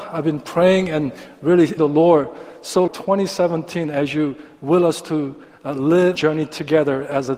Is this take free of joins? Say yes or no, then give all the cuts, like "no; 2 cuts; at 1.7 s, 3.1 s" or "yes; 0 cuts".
no; 3 cuts; at 1.8 s, 2.9 s, 6.2 s